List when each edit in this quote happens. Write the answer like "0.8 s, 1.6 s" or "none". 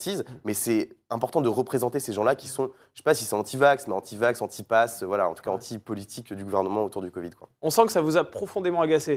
none